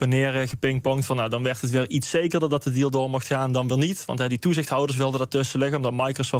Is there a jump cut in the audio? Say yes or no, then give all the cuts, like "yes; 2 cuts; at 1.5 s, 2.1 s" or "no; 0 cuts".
no; 0 cuts